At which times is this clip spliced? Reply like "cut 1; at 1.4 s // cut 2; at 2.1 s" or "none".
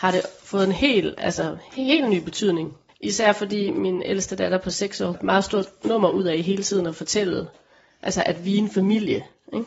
cut 1; at 2.9 s // cut 2; at 5.1 s